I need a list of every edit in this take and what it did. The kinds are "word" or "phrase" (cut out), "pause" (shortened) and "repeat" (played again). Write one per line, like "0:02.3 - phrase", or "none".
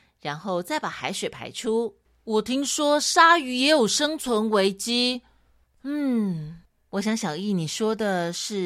none